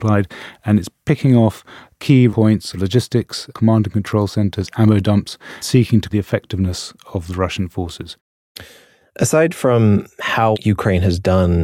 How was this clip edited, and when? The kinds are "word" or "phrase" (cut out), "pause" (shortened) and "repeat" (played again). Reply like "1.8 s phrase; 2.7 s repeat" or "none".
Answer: 2.3 s word; 2.7 s word; 3.5 s word; 5.6 s word; 6.1 s word; 10.5 s word